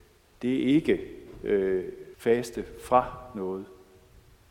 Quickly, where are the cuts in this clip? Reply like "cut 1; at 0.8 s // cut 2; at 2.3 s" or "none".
cut 1; at 2.1 s